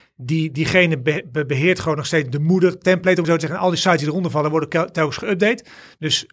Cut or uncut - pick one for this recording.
cut